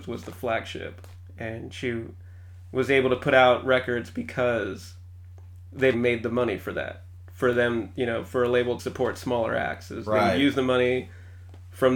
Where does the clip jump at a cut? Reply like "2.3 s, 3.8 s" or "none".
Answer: 5.9 s, 8.8 s